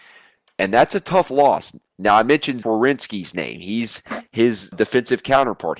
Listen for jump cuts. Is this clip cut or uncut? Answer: cut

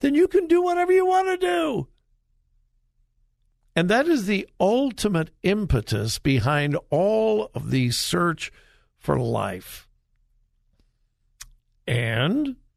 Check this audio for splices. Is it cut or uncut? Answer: uncut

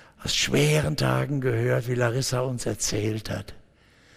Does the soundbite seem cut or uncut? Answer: uncut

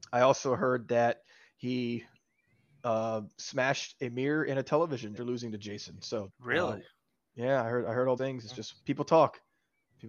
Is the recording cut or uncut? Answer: cut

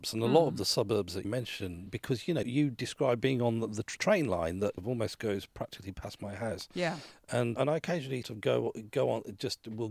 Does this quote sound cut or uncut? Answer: cut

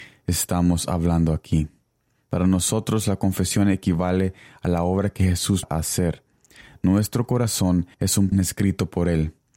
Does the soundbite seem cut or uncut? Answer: cut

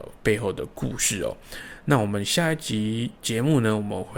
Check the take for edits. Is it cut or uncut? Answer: cut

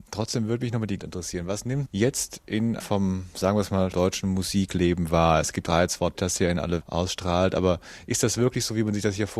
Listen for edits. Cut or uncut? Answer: cut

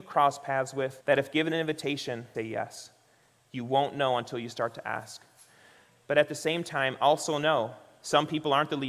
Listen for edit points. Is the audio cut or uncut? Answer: cut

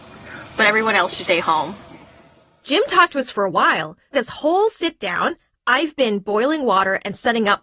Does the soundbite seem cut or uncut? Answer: cut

